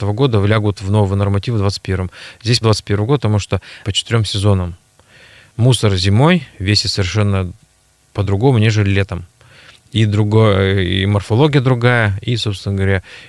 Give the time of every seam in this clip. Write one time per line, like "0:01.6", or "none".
0:02.6
0:03.8